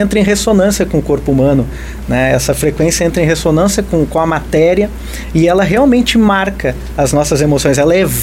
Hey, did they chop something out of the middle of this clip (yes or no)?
no